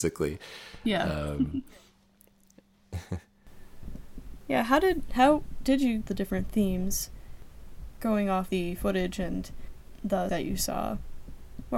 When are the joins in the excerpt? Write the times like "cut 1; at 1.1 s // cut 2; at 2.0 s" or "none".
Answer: cut 1; at 6.0 s // cut 2; at 8.5 s // cut 3; at 10.3 s